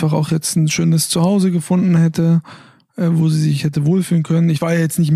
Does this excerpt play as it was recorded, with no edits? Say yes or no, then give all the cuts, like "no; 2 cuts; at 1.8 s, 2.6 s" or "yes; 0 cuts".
yes; 0 cuts